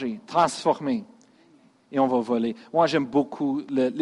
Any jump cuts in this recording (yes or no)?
no